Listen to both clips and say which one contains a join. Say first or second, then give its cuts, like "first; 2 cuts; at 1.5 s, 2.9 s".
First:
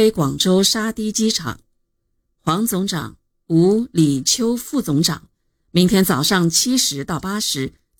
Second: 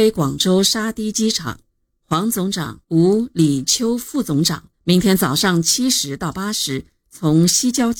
second; 3 cuts; at 1.7 s, 2.8 s, 4.7 s